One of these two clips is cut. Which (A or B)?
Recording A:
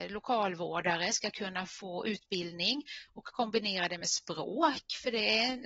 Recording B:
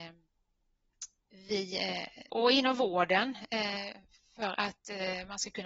B